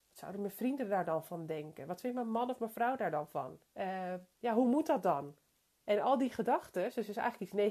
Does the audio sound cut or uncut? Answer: cut